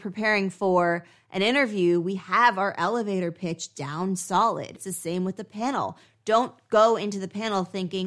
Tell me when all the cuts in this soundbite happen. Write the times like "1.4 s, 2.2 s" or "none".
none